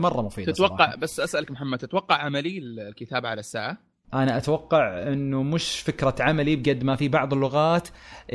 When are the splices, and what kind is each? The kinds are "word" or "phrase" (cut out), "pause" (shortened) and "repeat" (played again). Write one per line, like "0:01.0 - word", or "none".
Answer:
none